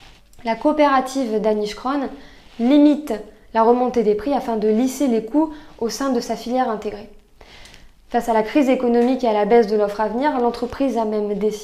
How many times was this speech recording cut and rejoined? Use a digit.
0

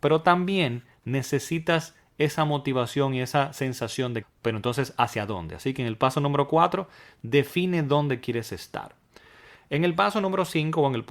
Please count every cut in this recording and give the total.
1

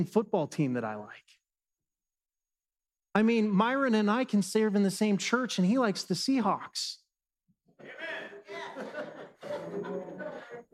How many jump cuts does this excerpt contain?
0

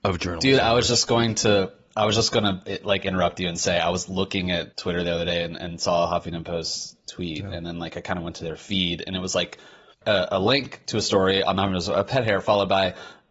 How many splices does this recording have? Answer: 0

